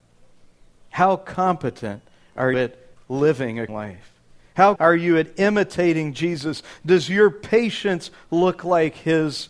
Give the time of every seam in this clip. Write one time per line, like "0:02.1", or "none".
0:02.5
0:03.7
0:04.8